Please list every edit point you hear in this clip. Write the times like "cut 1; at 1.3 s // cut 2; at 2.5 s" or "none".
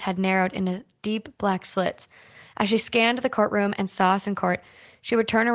none